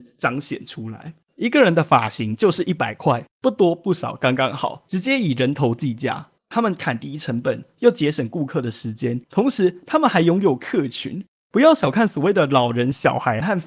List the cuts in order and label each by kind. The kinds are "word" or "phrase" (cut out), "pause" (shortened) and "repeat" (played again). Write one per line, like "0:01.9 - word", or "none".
0:09.2 - pause
0:11.3 - pause

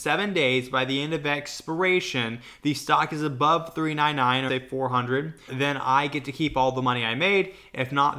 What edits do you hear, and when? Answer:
0:04.5 - word
0:05.5 - word

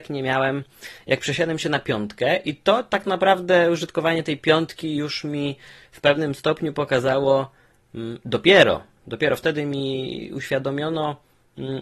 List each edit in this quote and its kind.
none

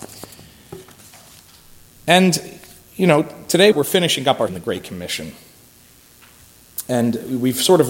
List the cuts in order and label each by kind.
0:03.7 - word
0:04.5 - word

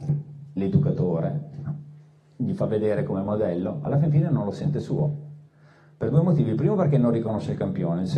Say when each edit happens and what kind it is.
none

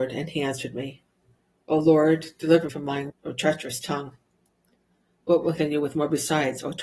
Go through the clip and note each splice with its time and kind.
0:02.7 - word
0:03.1 - word
0:05.6 - word

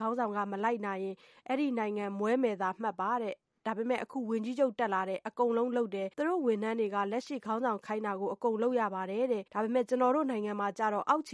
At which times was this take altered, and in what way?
0:06.1 - pause
0:09.5 - pause

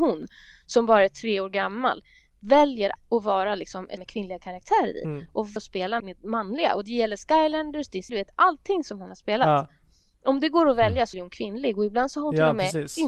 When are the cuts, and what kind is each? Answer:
0:03.0 - word
0:04.0 - word
0:05.6 - word
0:06.0 - word
0:08.1 - word
0:11.1 - word

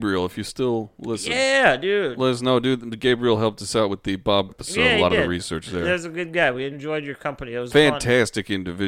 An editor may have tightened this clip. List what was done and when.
0:04.5 - word
0:06.7 - word

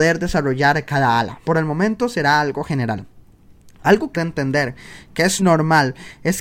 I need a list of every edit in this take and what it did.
0:01.4 - word
0:04.1 - word
0:05.4 - word

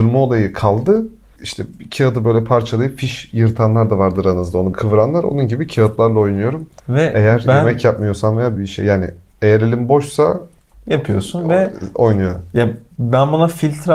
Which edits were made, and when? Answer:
0:04.7 - word
0:06.8 - pause
0:08.6 - word

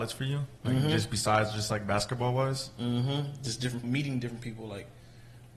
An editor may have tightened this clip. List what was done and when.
0:03.8 - word

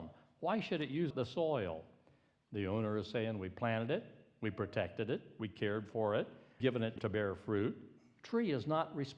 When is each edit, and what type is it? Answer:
0:01.1 - word
0:06.6 - word
0:07.0 - word

